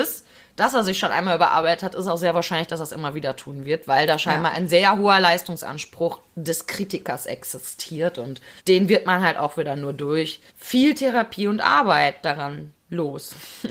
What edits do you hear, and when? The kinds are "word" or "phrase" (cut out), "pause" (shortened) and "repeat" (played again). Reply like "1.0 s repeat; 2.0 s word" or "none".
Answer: 8.6 s pause; 10.5 s pause

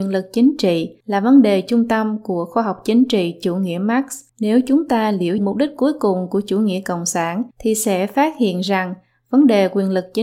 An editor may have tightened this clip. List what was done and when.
1.0 s pause; 4.3 s pause; 5.4 s phrase; 7.5 s pause

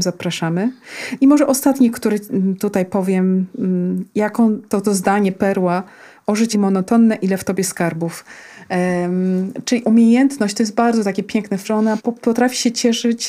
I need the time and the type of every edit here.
4.8 s word; 6.5 s word; 11.6 s word; 12.0 s word

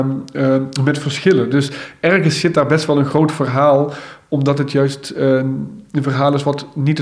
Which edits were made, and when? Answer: none

